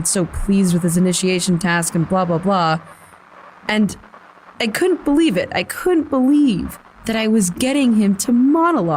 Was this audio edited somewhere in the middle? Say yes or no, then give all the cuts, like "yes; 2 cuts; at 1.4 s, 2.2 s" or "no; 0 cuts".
no; 0 cuts